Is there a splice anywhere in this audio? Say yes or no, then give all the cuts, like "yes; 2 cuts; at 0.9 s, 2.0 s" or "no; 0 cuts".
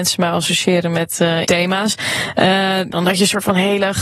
yes; 2 cuts; at 1.4 s, 2.9 s